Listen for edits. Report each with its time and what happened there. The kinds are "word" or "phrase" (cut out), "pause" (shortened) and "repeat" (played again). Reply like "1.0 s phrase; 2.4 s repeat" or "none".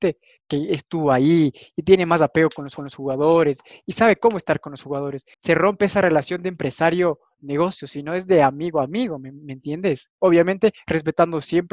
2.8 s repeat; 5.3 s pause

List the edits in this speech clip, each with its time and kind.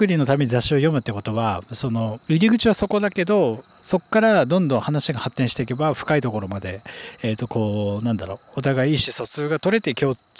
2.2 s pause; 3.7 s pause

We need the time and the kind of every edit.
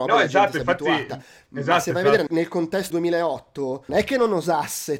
2.3 s word; 2.9 s word; 3.9 s word

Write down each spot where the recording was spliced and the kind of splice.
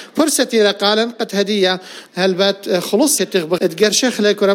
2.1 s word; 3.2 s word; 3.6 s word

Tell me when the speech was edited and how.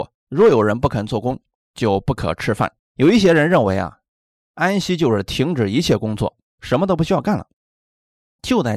2.8 s pause; 6.5 s pause

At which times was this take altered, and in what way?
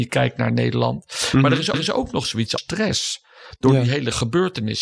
1.7 s repeat; 2.6 s word

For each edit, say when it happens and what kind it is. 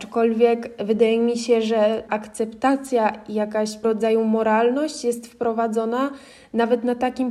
2.1 s word; 3.8 s word

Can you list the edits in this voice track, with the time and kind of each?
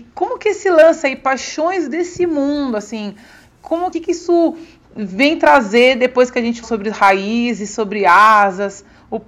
3.9 s word; 6.6 s word

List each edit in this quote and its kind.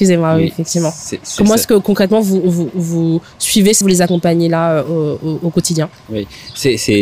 3.8 s word

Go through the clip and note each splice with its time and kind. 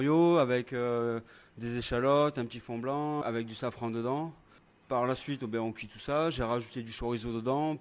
3.2 s word

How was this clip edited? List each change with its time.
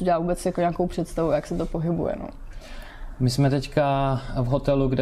none

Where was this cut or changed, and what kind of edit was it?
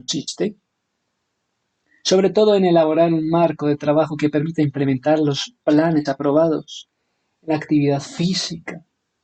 none

